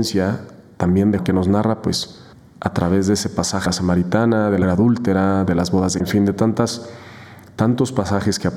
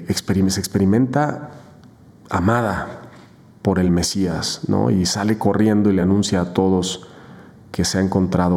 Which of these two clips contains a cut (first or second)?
first